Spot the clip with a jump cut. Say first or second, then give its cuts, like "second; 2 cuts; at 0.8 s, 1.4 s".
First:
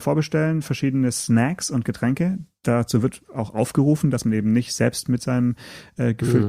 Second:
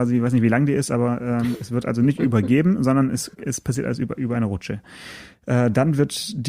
second; 1 cut; at 3.3 s